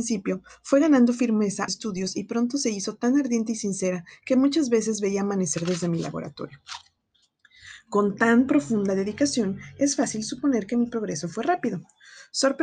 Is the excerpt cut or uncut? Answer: cut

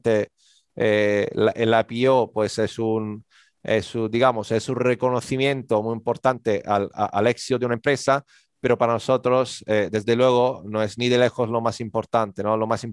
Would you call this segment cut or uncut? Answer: uncut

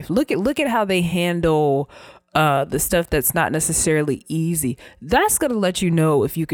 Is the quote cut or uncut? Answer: uncut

